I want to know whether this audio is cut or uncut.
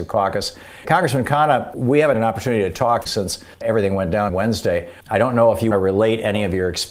cut